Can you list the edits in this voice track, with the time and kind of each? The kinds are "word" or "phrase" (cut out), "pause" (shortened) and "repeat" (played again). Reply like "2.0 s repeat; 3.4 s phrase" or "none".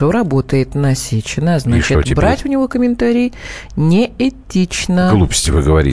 none